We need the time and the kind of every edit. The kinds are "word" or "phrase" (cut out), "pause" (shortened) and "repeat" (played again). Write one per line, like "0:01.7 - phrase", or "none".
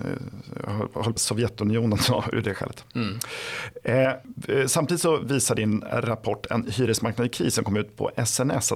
0:01.2 - word

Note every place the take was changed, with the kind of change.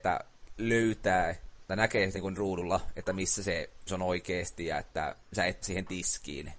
0:02.1 - word
0:03.9 - word
0:05.6 - word

